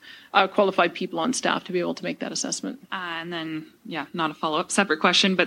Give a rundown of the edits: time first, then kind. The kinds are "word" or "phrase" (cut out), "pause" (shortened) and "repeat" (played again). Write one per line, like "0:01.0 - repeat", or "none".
0:02.8 - pause